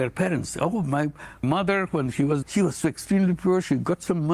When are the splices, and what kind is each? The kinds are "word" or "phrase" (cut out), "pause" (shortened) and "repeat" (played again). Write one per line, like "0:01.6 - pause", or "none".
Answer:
0:01.4 - phrase
0:02.4 - word